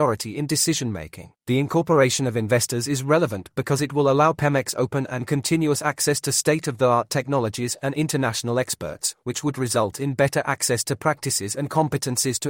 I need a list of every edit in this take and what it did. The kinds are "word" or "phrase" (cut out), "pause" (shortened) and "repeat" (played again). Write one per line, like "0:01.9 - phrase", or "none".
0:01.4 - pause